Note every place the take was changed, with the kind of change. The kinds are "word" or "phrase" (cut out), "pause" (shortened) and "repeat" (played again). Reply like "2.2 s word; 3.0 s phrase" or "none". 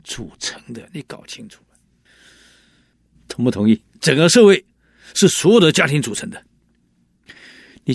3.9 s pause